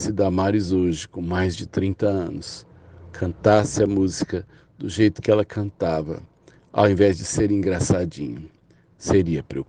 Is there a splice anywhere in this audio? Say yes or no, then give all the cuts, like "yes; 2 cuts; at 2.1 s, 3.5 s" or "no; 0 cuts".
no; 0 cuts